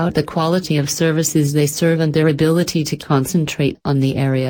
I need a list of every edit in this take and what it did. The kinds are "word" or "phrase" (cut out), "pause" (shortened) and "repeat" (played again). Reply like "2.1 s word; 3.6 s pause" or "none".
none